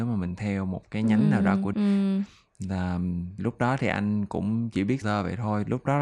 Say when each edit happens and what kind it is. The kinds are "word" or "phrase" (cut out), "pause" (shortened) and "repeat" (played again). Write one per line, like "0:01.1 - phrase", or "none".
0:01.7 - word
0:03.4 - word
0:05.0 - word